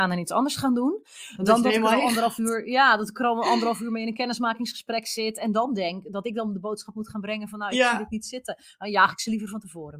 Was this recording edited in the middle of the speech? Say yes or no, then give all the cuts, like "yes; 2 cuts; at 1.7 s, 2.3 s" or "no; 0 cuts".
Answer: no; 0 cuts